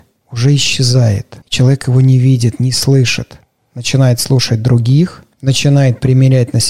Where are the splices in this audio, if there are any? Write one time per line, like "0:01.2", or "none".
0:01.4